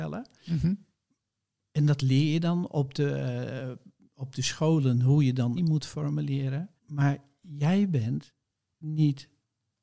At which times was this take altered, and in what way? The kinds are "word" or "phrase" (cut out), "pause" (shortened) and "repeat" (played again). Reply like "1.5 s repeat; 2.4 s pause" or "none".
5.6 s phrase; 6.8 s pause